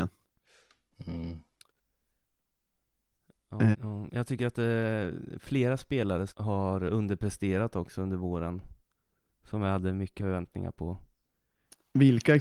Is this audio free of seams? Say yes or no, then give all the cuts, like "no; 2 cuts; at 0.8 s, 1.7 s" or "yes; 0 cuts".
no; 3 cuts; at 3.7 s, 6.3 s, 10.2 s